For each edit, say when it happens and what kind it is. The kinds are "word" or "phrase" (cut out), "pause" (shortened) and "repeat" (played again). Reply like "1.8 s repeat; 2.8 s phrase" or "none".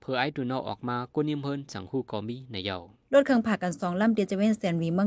3.0 s pause